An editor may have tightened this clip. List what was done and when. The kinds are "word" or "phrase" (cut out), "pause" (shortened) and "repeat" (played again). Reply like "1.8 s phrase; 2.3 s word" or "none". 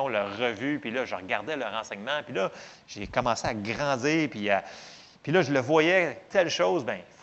none